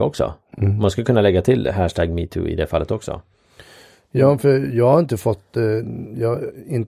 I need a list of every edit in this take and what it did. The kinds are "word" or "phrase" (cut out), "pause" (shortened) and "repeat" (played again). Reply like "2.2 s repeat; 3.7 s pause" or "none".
none